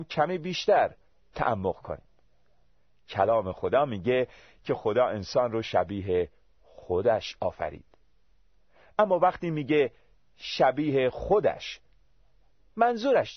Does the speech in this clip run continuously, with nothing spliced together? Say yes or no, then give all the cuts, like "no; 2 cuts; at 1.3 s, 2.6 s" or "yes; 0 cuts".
yes; 0 cuts